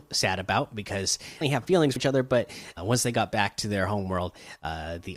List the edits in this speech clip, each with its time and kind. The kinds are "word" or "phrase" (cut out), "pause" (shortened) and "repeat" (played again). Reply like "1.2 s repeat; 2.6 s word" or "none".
1.4 s phrase; 2.0 s word; 2.8 s word